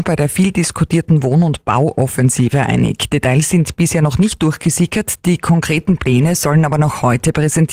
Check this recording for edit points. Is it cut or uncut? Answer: uncut